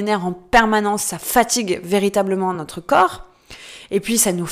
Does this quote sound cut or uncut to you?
uncut